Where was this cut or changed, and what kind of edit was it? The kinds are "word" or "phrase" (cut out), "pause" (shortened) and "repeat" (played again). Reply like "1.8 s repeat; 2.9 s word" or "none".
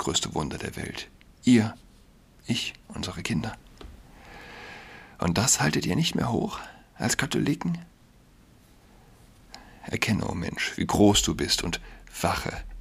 none